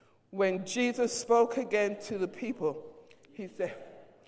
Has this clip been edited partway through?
no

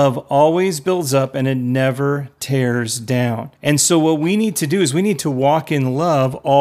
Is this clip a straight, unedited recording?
no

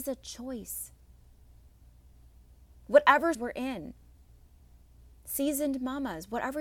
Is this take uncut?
no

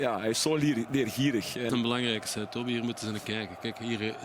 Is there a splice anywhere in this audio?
yes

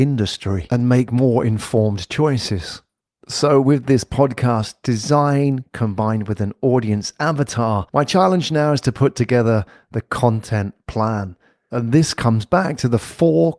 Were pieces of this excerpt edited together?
no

